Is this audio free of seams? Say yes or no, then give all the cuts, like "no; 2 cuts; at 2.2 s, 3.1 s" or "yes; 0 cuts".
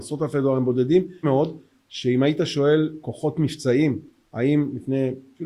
no; 1 cut; at 1.2 s